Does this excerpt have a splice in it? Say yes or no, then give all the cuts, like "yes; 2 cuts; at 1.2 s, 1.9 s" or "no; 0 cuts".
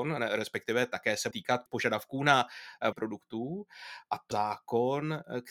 yes; 3 cuts; at 1.3 s, 2.9 s, 4.3 s